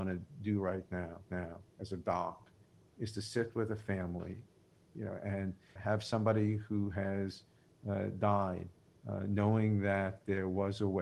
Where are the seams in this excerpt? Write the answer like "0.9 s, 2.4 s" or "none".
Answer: 1.3 s, 4.9 s, 5.8 s

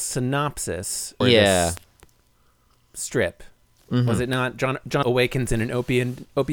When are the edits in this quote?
1.2 s, 5.0 s

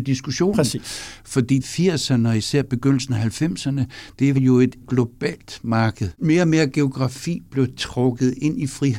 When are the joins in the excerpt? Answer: 1.6 s, 4.3 s, 4.8 s

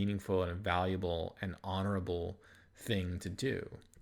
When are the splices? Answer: none

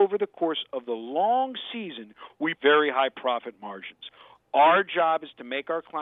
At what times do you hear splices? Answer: 2.5 s

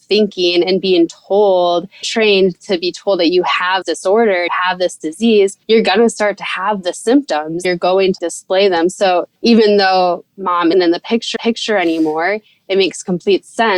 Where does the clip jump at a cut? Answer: 2.0 s, 3.8 s, 4.5 s, 5.6 s, 7.6 s, 8.2 s, 9.4 s, 10.7 s, 11.4 s

